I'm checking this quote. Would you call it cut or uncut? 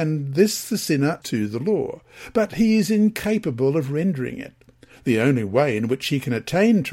cut